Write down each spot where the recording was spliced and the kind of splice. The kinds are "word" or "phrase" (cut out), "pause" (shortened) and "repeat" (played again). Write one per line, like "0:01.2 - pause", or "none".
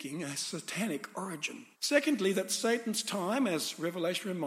0:01.7 - pause